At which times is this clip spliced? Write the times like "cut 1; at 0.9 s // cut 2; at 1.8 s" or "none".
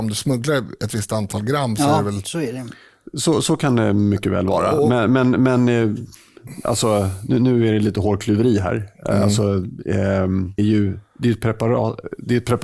cut 1; at 10.6 s